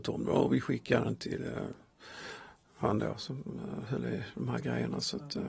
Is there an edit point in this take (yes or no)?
no